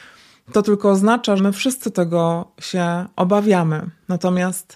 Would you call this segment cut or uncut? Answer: cut